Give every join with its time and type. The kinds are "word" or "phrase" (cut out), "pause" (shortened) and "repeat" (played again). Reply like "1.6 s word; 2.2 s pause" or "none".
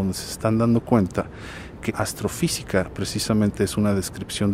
1.9 s word

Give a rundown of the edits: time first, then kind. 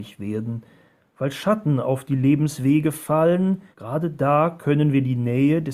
3.7 s pause

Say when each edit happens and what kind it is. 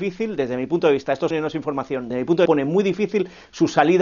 1.3 s word; 2.1 s word; 2.5 s word

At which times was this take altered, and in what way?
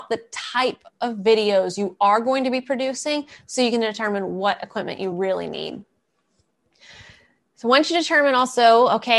none

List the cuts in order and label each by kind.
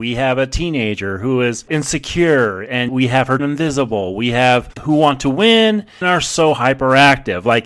1.7 s word; 2.9 s word; 3.4 s word; 4.8 s word; 6.0 s word

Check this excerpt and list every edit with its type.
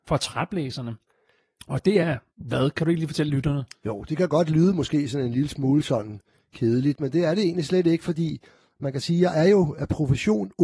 none

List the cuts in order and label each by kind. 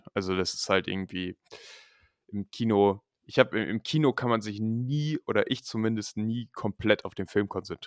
none

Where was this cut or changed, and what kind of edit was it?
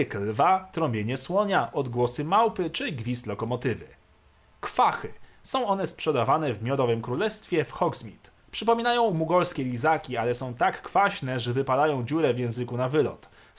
none

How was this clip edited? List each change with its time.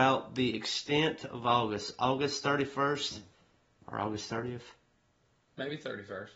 none

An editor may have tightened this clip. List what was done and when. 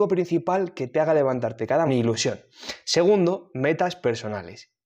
1.9 s phrase

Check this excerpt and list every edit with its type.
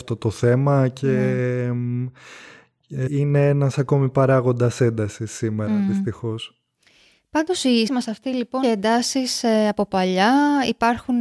3.1 s word; 7.9 s word; 8.6 s word

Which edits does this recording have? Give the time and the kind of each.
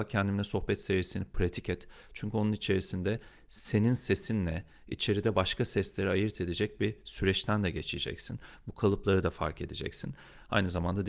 none

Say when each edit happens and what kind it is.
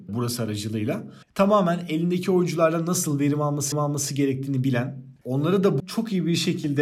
1.2 s pause; 3.7 s repeat; 5.8 s word

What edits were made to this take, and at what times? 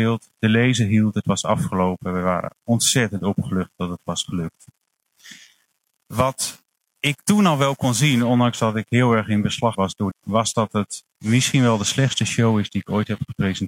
9.7 s word; 10.1 s phrase; 11.1 s pause

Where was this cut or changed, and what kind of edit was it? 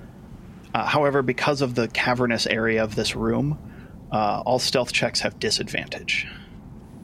none

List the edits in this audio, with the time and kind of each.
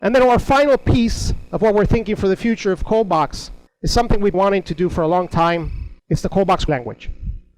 3.7 s pause; 4.3 s word; 6.0 s pause; 6.7 s word

